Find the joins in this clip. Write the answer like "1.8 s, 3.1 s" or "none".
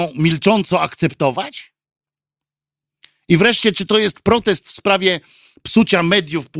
none